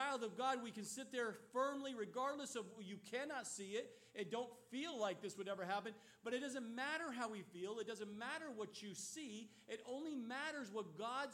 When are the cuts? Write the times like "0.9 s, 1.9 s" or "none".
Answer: none